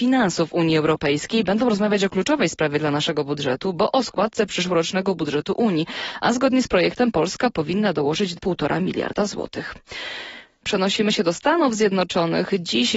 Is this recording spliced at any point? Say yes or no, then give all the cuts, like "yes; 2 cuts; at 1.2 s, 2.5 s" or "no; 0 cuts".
yes; 1 cut; at 8.4 s